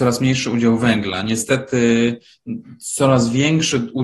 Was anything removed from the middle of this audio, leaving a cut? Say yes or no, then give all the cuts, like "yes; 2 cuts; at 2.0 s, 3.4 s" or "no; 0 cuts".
no; 0 cuts